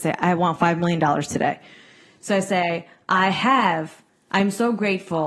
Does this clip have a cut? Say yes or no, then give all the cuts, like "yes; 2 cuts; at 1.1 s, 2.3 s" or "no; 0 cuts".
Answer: no; 0 cuts